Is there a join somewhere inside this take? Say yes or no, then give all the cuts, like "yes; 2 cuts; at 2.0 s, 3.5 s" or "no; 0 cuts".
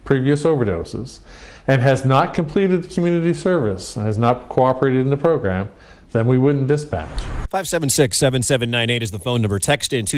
no; 0 cuts